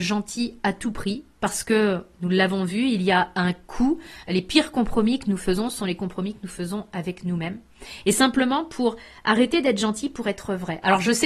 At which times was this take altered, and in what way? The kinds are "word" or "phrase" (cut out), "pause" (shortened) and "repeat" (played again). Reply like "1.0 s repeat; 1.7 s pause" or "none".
none

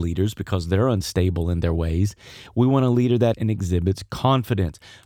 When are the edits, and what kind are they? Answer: 3.3 s word

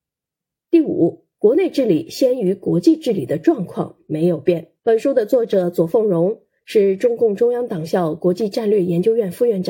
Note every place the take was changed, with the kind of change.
1.3 s pause; 4.8 s pause

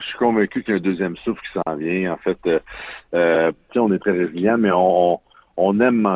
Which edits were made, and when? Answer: none

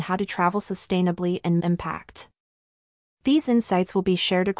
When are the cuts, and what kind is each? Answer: 1.6 s phrase

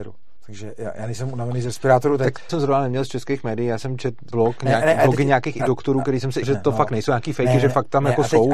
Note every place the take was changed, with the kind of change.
2.5 s word; 4.3 s word; 5.6 s word; 6.4 s word

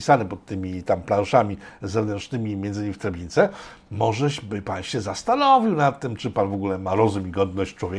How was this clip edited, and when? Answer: none

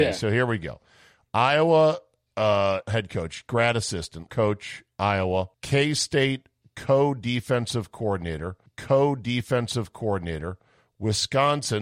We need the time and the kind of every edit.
2.8 s phrase; 4.3 s word; 5.5 s pause; 8.7 s repeat

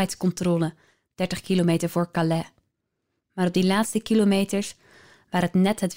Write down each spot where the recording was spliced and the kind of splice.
none

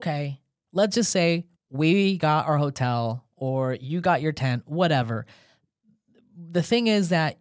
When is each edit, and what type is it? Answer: 1.6 s pause

